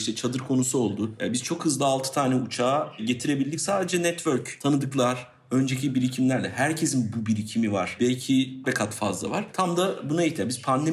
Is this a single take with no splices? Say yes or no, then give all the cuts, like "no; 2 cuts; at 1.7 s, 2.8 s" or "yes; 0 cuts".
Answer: no; 1 cut; at 8.6 s